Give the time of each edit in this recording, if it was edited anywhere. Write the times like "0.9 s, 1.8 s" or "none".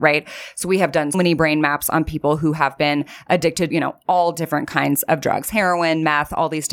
1.1 s, 3.7 s